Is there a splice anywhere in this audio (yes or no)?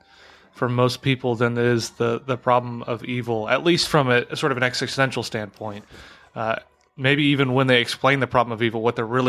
no